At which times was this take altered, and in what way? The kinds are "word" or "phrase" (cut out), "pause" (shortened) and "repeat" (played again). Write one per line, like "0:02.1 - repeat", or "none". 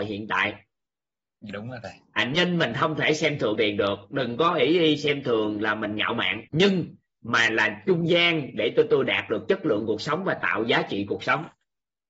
0:01.5 - word
0:03.6 - word
0:06.5 - pause